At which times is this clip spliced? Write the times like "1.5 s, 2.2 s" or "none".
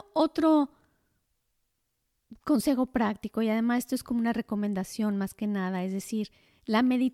none